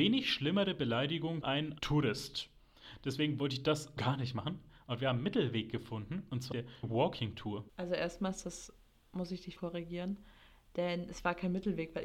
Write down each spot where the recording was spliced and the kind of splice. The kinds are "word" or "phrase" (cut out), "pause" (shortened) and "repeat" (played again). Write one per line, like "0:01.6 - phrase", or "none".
0:01.4 - word
0:01.8 - word
0:04.0 - word
0:06.5 - word
0:06.8 - word
0:09.6 - word